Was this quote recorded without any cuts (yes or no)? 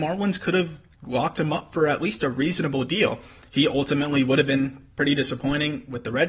yes